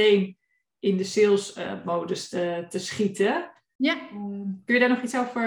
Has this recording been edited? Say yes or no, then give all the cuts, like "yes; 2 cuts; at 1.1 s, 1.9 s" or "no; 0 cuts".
no; 0 cuts